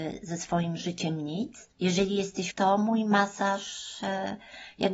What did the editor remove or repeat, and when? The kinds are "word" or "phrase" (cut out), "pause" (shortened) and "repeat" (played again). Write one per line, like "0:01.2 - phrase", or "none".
0:01.7 - pause
0:02.5 - phrase